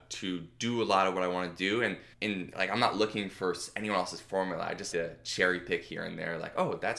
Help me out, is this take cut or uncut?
cut